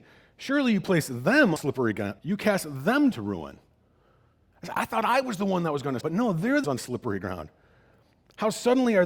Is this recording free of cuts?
no; 5 cuts; at 1.6 s, 2.2 s, 3.1 s, 6.0 s, 6.6 s

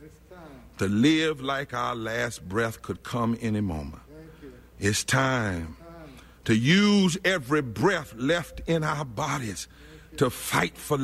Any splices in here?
no; 0 cuts

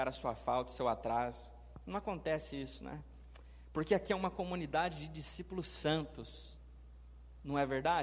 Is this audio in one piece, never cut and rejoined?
yes; 0 cuts

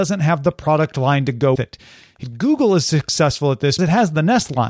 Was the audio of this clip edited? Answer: yes; 3 cuts; at 1.6 s, 2.2 s, 3.8 s

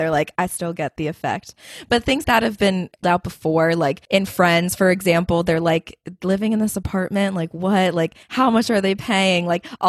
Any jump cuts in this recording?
yes; 4 cuts; at 2.2 s, 3.0 s, 4.0 s, 8.2 s

